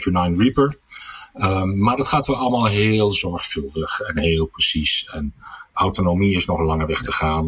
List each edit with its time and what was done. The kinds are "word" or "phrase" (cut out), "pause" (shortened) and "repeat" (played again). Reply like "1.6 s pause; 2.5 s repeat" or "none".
5.7 s word